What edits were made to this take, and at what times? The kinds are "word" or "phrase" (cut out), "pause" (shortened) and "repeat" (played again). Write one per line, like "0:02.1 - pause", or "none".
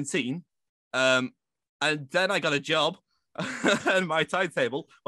none